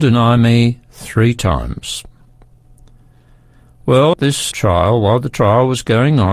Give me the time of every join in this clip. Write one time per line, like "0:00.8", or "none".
0:04.1
0:04.5

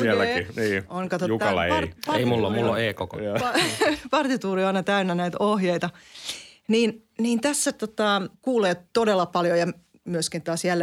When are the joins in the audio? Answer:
0:08.3

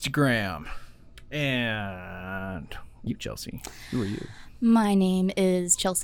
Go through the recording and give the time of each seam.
0:03.1

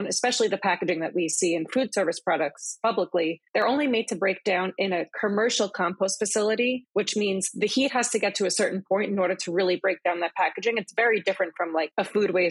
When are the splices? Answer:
none

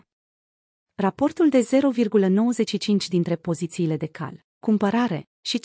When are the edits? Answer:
none

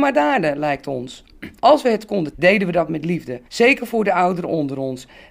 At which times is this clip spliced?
0:01.6
0:02.3
0:03.5

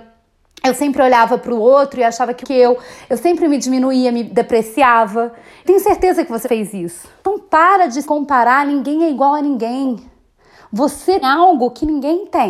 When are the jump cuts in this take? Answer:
0:02.4
0:05.6
0:06.4
0:07.2
0:08.0
0:11.2

